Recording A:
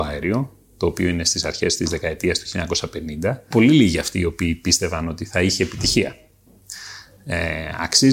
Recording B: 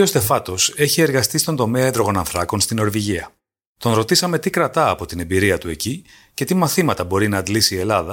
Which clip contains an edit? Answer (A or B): A